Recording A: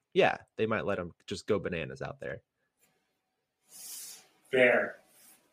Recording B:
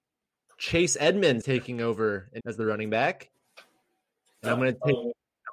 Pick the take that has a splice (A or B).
B